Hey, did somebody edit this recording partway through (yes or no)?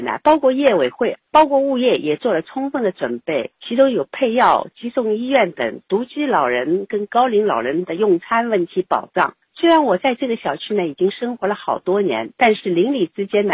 yes